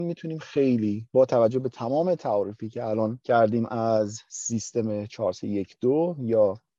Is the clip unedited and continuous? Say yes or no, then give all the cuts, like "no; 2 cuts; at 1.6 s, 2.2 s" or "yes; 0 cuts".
yes; 0 cuts